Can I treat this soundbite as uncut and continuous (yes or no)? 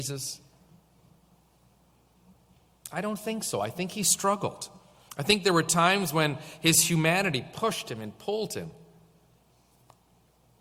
yes